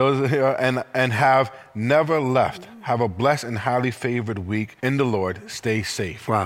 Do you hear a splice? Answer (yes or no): yes